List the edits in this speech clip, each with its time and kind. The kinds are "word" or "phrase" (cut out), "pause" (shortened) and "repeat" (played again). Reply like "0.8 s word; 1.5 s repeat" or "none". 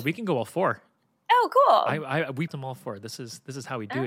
2.5 s word